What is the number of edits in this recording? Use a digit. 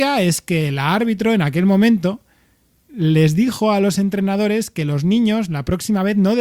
0